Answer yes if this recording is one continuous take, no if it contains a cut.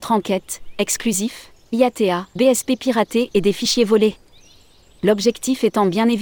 no